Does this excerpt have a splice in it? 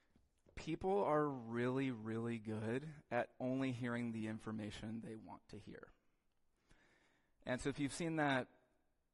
no; 0 cuts

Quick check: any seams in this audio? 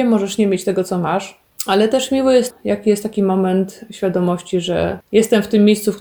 yes; 1 cut; at 2.5 s

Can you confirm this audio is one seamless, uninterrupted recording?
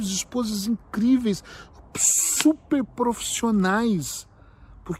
yes; 0 cuts

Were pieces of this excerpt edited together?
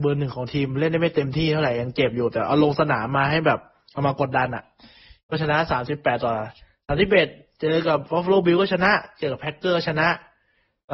no; 0 cuts

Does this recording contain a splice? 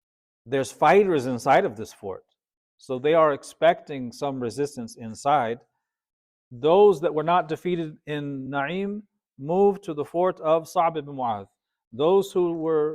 no; 0 cuts

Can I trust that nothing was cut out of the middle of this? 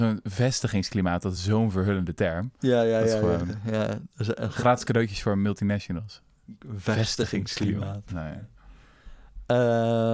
yes; 0 cuts

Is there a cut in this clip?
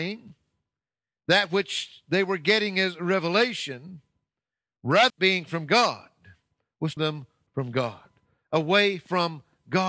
yes; 3 cuts; at 5.1 s, 7.0 s, 7.5 s

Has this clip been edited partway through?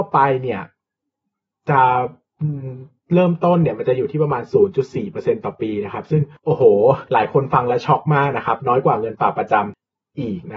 no; 0 cuts

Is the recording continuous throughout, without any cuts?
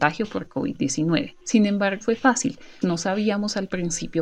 no; 3 cuts; at 1.4 s, 2.0 s, 2.8 s

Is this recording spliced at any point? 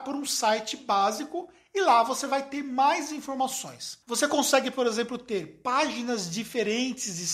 yes; 1 cut; at 4.0 s

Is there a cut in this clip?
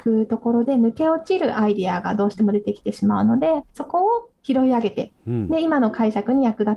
yes; 2 cuts; at 3.7 s, 4.4 s

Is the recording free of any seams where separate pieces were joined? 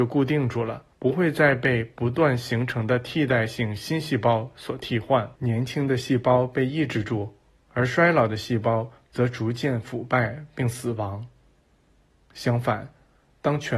no; 2 cuts; at 0.9 s, 5.3 s

